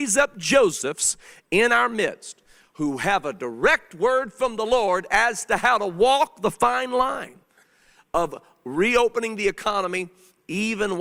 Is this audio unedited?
yes; 0 cuts

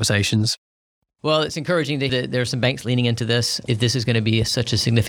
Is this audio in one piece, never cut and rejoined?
no; 1 cut; at 2.1 s

